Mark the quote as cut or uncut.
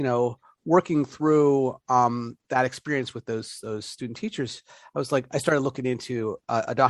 uncut